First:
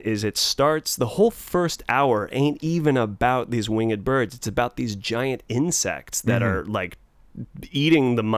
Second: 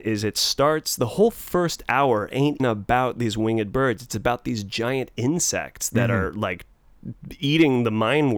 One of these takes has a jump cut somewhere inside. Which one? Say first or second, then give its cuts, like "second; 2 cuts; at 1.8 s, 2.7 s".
second; 1 cut; at 2.6 s